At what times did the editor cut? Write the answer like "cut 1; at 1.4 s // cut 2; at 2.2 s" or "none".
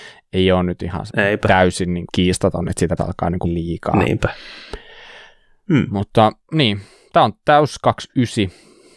cut 1; at 1.1 s // cut 2; at 2.1 s // cut 3; at 3.0 s // cut 4; at 3.4 s // cut 5; at 6.4 s